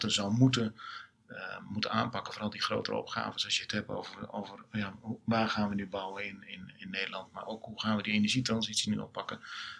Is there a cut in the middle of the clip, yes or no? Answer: no